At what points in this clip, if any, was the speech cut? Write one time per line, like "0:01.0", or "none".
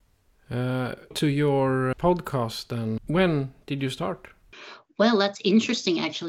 0:01.1
0:01.9
0:03.0